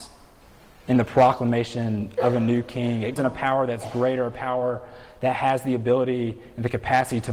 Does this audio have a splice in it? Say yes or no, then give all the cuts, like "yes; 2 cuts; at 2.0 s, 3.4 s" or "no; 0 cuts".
yes; 1 cut; at 3.2 s